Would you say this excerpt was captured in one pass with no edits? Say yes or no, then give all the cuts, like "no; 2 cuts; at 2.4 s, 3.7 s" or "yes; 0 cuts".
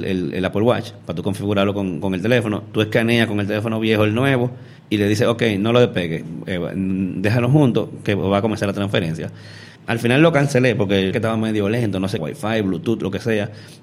no; 4 cuts; at 4.8 s, 9.8 s, 11.1 s, 12.2 s